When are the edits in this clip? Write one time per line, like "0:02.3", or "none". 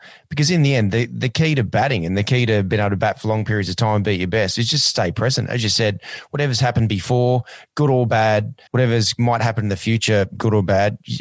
0:08.7

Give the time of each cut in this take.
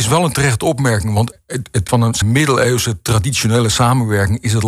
0:01.3
0:01.9
0:02.2

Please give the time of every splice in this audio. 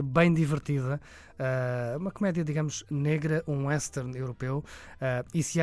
none

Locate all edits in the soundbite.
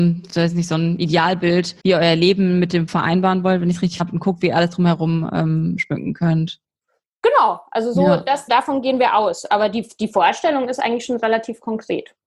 0:01.8
0:02.9
0:04.0
0:08.5

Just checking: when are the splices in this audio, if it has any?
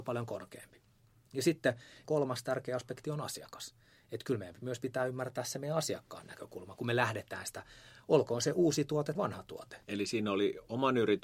0:09.1
0:09.8

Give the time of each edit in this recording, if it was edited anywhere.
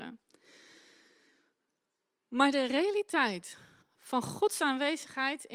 0:03.8

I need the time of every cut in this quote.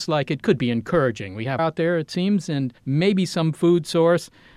0:01.6
0:02.8

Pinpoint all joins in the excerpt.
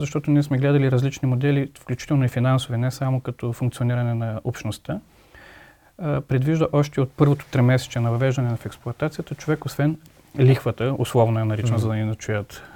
none

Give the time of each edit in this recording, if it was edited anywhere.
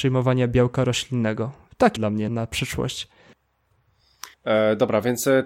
0:02.0
0:02.3
0:04.3

